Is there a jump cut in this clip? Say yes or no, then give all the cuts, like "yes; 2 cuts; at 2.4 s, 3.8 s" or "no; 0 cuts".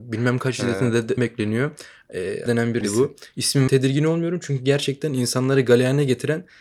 yes; 4 cuts; at 1.2 s, 2.5 s, 2.8 s, 3.7 s